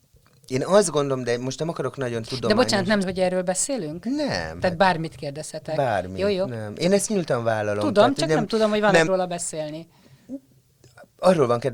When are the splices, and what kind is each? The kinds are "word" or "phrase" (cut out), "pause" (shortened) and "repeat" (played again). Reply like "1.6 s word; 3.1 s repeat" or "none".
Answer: 3.0 s word; 9.1 s word